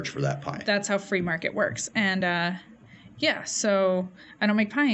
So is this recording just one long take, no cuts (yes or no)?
yes